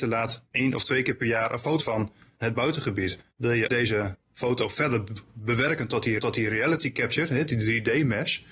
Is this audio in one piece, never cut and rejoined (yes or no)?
no